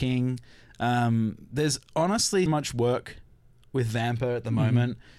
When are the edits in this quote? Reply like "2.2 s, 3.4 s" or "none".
2.5 s